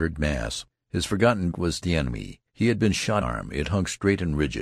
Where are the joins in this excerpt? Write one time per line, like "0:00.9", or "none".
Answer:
0:01.5
0:01.8
0:02.5
0:03.2